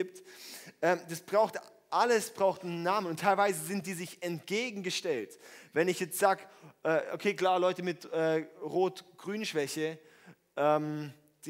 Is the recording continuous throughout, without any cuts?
yes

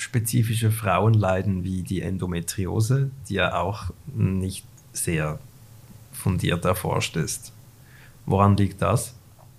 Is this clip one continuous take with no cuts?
yes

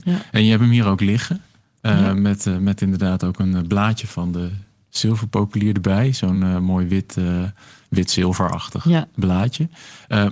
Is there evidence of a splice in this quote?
no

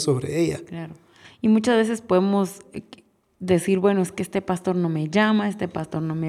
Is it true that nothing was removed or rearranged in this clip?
yes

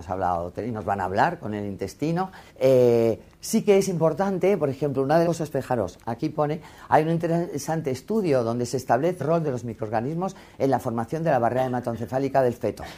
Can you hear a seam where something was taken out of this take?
yes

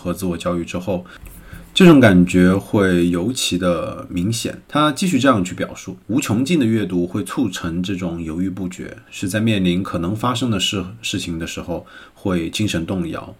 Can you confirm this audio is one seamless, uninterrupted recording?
no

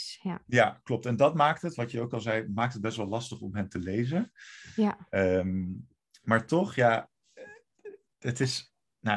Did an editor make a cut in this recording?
no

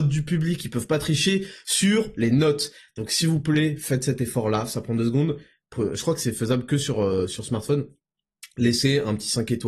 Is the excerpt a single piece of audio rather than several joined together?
yes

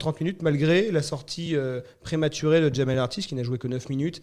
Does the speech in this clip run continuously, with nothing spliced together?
yes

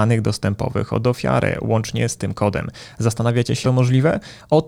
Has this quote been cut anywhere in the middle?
yes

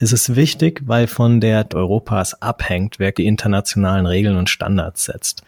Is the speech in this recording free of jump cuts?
no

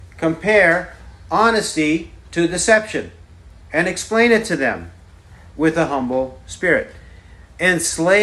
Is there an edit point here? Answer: no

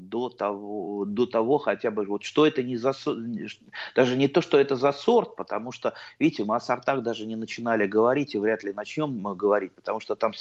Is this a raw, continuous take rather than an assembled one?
yes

